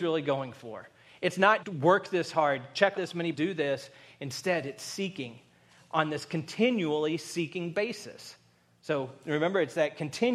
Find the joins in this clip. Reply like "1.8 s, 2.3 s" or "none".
1.6 s, 2.9 s, 3.3 s